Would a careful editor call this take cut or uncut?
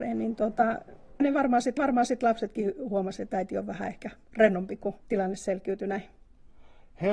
cut